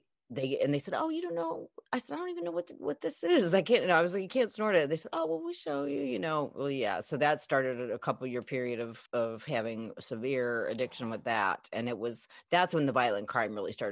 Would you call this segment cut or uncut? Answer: cut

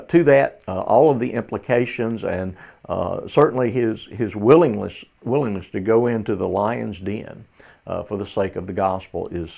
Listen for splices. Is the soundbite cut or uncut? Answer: uncut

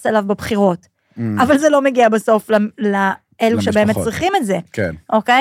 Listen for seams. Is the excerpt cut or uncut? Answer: uncut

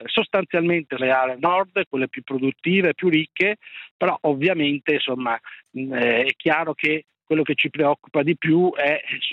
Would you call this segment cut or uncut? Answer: cut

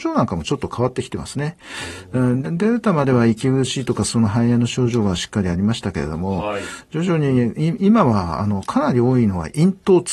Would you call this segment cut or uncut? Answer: cut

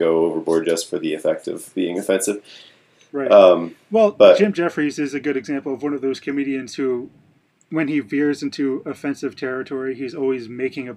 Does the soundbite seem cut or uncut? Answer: uncut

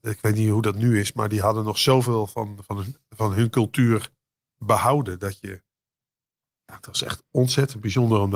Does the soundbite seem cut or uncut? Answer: uncut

